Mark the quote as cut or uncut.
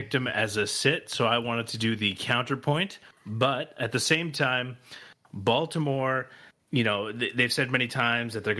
cut